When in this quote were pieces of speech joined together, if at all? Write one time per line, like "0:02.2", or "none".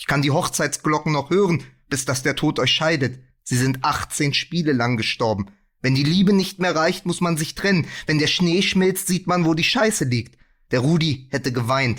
none